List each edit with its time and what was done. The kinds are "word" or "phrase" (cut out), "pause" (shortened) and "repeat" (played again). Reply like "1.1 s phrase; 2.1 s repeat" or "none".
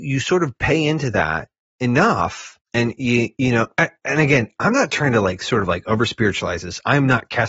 2.7 s pause